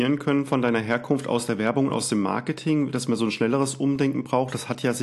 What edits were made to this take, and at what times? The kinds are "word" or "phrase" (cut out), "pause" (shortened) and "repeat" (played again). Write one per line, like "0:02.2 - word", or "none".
none